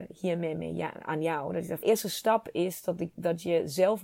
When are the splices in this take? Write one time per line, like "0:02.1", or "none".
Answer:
0:01.8